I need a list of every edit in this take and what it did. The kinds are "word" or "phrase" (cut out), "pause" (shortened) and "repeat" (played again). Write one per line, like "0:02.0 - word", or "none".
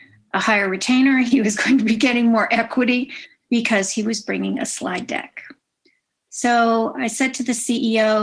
none